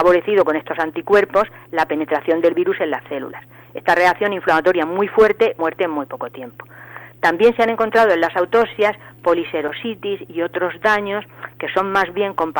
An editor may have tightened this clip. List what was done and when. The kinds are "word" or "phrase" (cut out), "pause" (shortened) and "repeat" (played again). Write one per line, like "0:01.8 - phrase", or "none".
0:05.6 - phrase